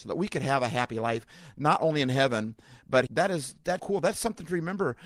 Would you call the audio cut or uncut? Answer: cut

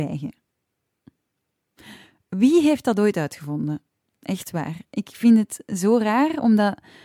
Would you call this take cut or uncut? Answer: uncut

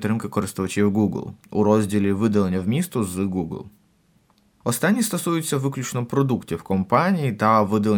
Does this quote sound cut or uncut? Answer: uncut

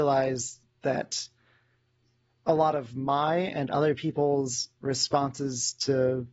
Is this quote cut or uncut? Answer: uncut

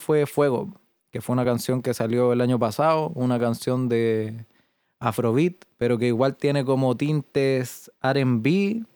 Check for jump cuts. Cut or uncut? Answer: uncut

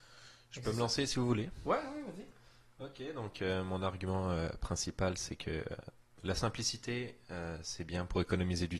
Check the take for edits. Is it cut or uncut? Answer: uncut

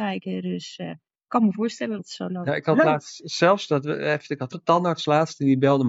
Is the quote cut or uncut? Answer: cut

